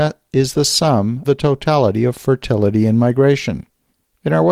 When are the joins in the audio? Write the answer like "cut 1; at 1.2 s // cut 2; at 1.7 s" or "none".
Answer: cut 1; at 1.2 s